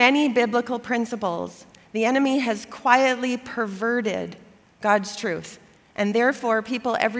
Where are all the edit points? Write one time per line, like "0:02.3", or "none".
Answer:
none